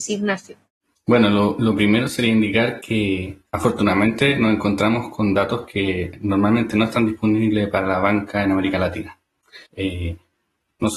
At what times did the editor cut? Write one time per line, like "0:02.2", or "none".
0:03.5
0:09.7